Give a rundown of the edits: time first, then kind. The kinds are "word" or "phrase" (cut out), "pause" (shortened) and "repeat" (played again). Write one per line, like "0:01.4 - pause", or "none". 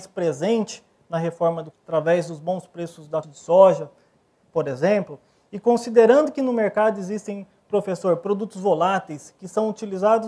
0:01.7 - word
0:03.2 - word